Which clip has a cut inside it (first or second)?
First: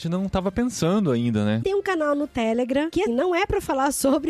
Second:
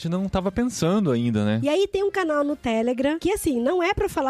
first